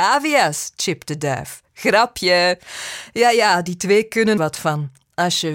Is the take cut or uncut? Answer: cut